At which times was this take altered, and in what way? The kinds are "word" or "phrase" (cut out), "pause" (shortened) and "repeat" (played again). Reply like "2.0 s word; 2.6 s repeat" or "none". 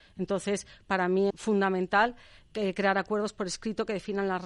1.3 s word